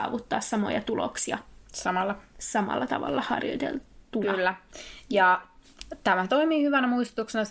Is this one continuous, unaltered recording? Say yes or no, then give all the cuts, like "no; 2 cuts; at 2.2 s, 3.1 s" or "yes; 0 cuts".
yes; 0 cuts